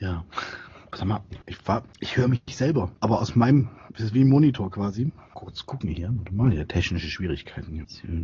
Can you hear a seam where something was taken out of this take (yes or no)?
yes